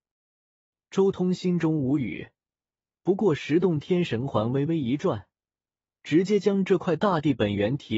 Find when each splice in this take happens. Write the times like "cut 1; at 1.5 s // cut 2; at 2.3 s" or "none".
none